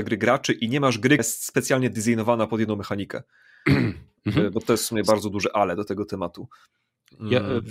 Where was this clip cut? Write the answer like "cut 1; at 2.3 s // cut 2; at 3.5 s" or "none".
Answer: cut 1; at 1.2 s